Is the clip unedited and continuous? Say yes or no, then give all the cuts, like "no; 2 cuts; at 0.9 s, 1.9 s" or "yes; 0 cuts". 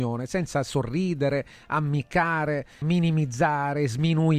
no; 1 cut; at 2.8 s